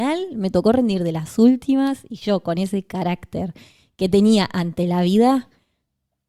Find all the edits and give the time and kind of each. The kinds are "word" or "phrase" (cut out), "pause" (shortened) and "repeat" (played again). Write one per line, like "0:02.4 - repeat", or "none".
none